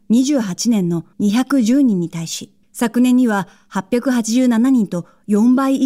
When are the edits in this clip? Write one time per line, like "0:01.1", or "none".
0:01.1
0:02.6